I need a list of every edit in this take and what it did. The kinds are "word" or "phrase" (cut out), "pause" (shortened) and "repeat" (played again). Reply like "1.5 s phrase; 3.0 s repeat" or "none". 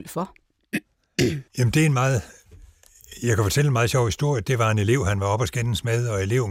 1.5 s pause